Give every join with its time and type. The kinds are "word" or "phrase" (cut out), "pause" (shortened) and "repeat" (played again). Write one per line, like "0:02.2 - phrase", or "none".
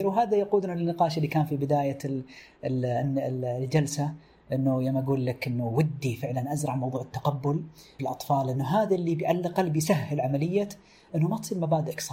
none